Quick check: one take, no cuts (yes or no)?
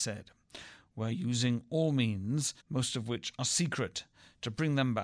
no